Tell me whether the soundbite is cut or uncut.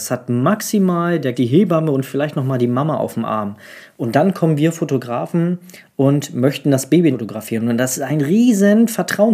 cut